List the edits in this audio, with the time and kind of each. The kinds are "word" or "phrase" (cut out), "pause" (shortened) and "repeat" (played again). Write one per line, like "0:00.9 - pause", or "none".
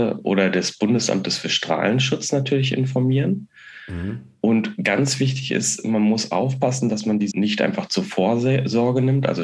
0:07.3 - word

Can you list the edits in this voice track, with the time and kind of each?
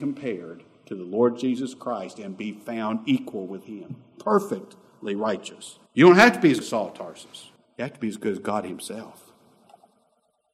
0:05.9 - pause
0:06.6 - word
0:07.6 - pause

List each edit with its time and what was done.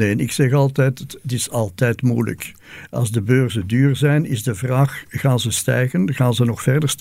none

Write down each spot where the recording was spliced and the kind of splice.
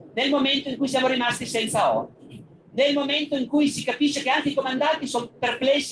none

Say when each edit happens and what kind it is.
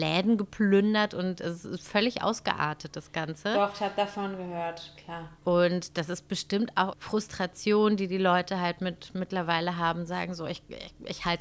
0:05.4 - pause
0:06.9 - phrase

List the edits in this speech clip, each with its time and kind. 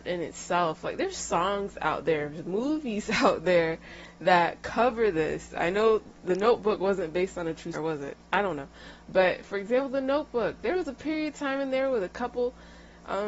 0:07.7 - word

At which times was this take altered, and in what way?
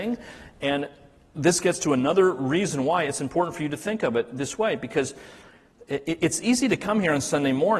none

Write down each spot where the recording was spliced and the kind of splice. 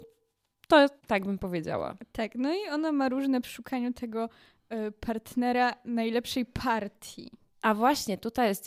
0:01.0 - word
0:03.4 - word

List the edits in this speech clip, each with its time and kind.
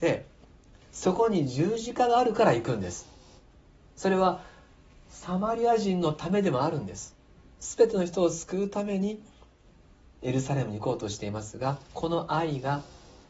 0:11.8 - pause

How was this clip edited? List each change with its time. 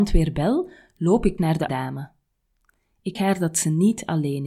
0:01.4 - word
0:01.7 - word
0:03.1 - word

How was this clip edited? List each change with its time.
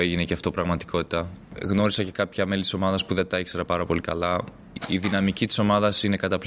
none

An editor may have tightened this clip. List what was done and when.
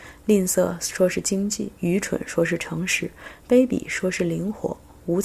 0:01.8 - pause

